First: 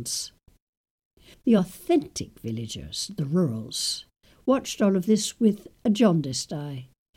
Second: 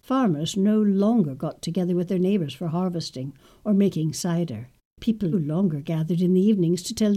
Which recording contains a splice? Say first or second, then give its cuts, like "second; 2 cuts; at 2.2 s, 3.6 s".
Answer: second; 1 cut; at 5.3 s